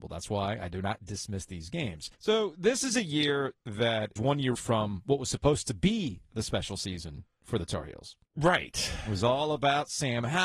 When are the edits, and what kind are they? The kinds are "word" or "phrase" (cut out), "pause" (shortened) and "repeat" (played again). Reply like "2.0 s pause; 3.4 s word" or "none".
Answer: 2.1 s pause; 4.2 s word; 4.5 s word; 8.2 s pause